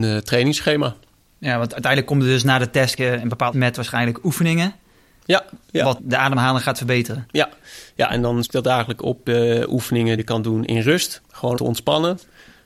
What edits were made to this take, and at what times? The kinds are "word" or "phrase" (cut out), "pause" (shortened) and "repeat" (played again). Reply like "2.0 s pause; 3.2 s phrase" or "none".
3.0 s word; 3.5 s word; 6.0 s word; 8.4 s word; 10.2 s word; 11.6 s word